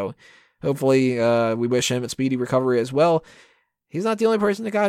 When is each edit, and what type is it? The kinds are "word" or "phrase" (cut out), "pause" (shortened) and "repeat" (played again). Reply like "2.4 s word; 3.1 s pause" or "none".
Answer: none